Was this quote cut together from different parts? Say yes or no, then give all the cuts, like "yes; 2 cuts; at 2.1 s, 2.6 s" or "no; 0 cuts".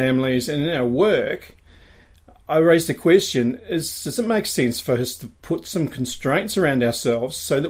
no; 0 cuts